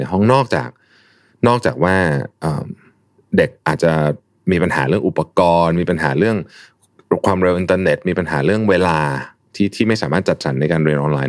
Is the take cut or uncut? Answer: uncut